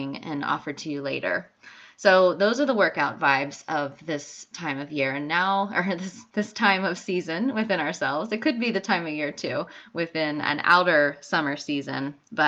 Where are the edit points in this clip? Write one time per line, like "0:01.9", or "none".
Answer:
none